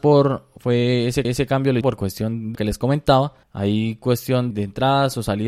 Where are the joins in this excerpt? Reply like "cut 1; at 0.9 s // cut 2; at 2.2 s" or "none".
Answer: cut 1; at 1.2 s // cut 2; at 1.8 s // cut 3; at 2.5 s // cut 4; at 3.4 s // cut 5; at 4.5 s